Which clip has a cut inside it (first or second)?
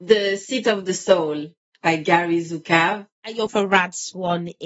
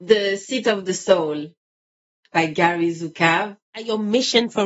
first